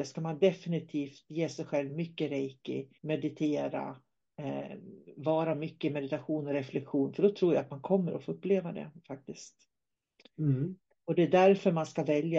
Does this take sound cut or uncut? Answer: cut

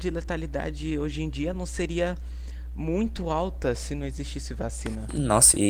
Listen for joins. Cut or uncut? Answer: uncut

